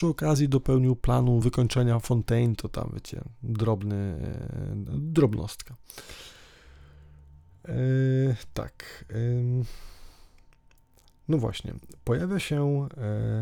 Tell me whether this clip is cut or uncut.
uncut